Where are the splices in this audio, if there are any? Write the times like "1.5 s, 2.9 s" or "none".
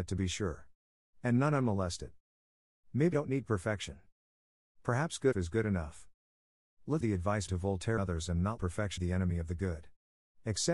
3.1 s, 5.3 s, 7.0 s, 7.5 s, 8.0 s, 8.6 s, 9.0 s